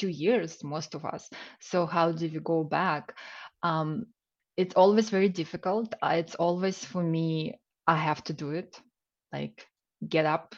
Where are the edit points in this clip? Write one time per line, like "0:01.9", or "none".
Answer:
none